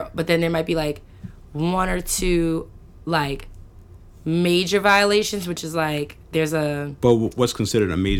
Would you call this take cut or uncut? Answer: uncut